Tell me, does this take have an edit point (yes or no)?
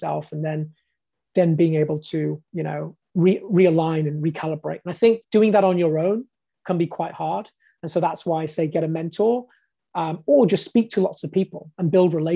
no